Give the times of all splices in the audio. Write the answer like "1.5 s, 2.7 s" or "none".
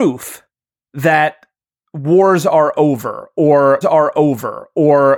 3.8 s